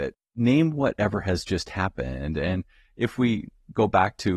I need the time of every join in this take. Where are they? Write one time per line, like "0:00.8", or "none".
none